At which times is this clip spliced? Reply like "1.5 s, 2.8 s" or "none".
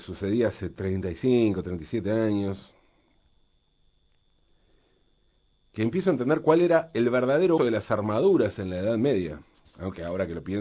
7.6 s